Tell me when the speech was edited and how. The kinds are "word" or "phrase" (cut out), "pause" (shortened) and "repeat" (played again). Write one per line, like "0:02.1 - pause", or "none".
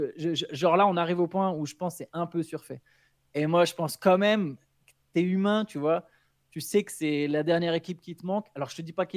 none